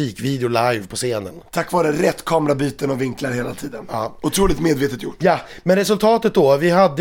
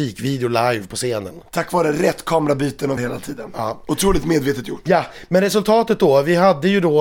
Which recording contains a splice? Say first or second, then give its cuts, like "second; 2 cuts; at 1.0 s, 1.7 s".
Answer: second; 1 cut; at 3.0 s